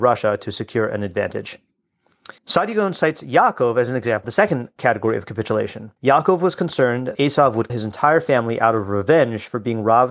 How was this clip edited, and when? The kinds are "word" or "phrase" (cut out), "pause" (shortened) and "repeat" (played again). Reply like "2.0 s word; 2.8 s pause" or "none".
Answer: 2.4 s pause; 4.2 s word; 6.0 s pause; 7.1 s word; 7.7 s word